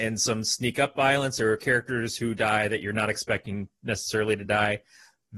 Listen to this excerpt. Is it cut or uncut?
uncut